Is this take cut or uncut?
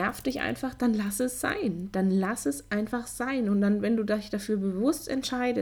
uncut